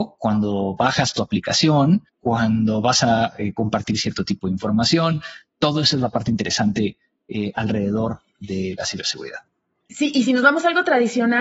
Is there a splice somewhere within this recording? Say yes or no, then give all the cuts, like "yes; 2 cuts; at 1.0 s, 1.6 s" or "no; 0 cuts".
yes; 1 cut; at 2.1 s